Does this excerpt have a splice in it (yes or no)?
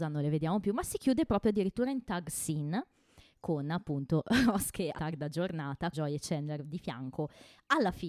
yes